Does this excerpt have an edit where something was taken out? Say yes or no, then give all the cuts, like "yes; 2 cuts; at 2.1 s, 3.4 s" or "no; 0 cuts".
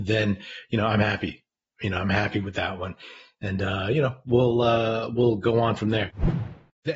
no; 0 cuts